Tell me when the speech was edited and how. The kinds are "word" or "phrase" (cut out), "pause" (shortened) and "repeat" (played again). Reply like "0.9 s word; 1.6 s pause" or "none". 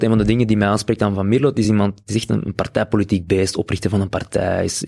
none